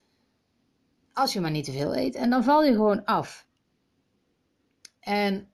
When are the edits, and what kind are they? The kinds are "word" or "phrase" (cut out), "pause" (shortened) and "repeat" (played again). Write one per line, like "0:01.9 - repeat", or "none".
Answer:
none